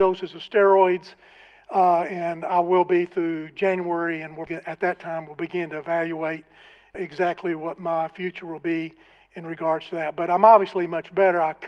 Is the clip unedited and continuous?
no; 2 cuts; at 4.5 s, 6.9 s

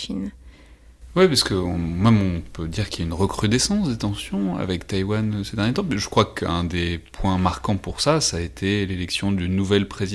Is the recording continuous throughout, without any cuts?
yes; 0 cuts

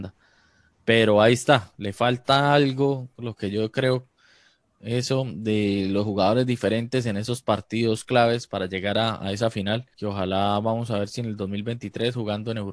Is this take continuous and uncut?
no; 1 cut; at 9.9 s

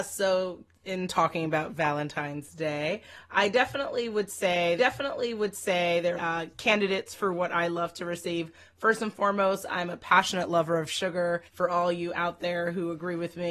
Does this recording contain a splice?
yes; 4 cuts; at 3.3 s, 4.8 s, 6.2 s, 11.5 s

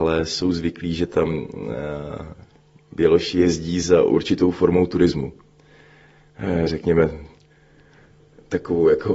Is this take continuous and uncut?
yes; 0 cuts

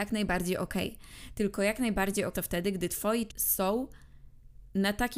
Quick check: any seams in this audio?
yes; 2 cuts; at 2.3 s, 3.3 s

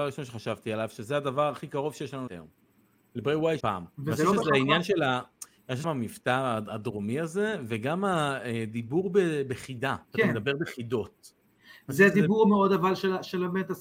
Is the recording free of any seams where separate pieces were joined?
no; 5 cuts; at 2.3 s, 3.6 s, 3.9 s, 5.8 s, 10.0 s

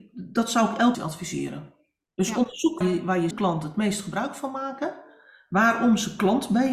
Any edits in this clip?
yes; 3 cuts; at 0.9 s, 2.8 s, 3.3 s

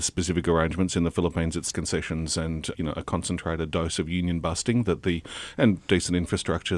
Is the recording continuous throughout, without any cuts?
no; 2 cuts; at 1.7 s, 2.7 s

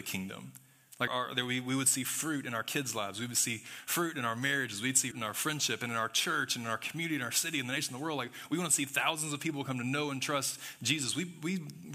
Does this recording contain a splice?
yes; 2 cuts; at 1.1 s, 5.1 s

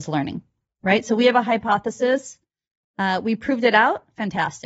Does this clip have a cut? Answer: no; 0 cuts

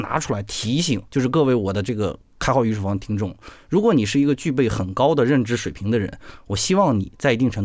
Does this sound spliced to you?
yes; 1 cut; at 1.1 s

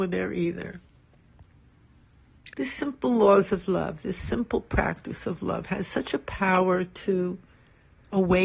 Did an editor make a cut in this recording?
yes; 1 cut; at 2.5 s

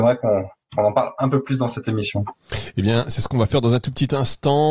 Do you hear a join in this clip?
no; 0 cuts

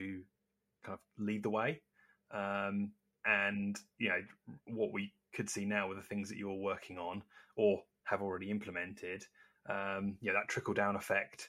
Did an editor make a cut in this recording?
yes; 1 cut; at 4.6 s

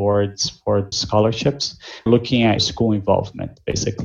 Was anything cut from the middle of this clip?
yes; 3 cuts; at 0.9 s, 2.1 s, 2.6 s

